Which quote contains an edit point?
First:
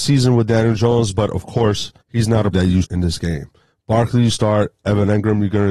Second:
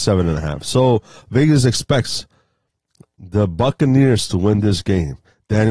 first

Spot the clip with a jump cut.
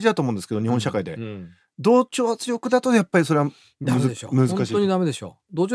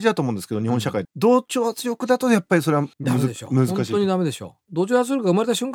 second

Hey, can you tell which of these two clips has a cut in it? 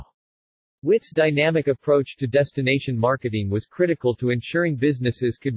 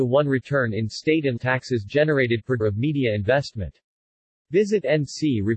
second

